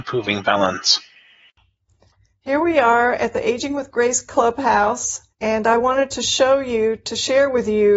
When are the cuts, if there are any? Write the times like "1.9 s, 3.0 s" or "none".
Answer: 5.3 s